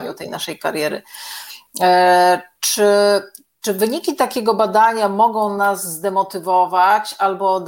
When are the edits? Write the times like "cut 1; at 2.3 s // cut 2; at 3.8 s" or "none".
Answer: none